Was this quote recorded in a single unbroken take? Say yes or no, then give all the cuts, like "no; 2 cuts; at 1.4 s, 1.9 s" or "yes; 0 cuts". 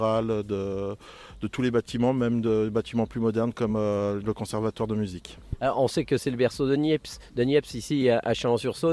yes; 0 cuts